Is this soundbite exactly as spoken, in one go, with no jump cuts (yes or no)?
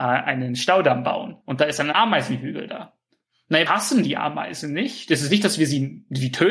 no